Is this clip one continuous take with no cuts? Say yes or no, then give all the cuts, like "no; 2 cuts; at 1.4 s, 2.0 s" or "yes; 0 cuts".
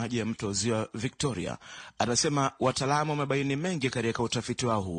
yes; 0 cuts